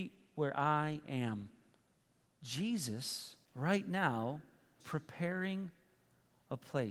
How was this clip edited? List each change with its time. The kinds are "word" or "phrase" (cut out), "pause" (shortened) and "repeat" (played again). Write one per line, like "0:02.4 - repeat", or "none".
0:03.5 - pause
0:04.8 - word